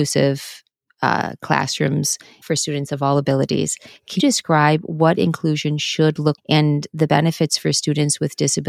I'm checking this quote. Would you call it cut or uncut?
cut